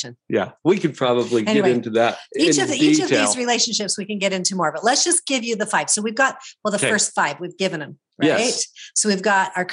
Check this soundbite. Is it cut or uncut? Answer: uncut